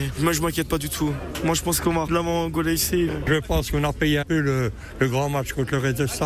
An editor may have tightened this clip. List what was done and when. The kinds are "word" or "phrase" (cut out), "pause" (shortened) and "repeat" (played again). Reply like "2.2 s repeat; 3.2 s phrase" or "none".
2.1 s word; 3.1 s word; 4.2 s word